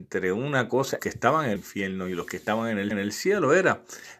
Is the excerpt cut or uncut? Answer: cut